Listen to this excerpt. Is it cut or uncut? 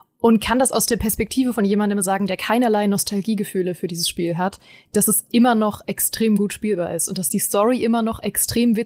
uncut